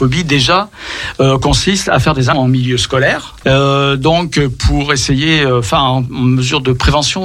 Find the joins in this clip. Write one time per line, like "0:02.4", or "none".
0:02.3
0:03.4